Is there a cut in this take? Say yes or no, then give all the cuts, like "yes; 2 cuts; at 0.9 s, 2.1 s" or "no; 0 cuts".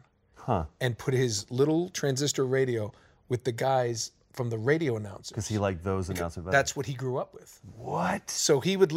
no; 0 cuts